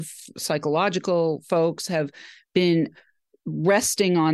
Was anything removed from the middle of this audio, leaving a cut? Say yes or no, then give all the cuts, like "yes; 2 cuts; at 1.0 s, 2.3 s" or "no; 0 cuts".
no; 0 cuts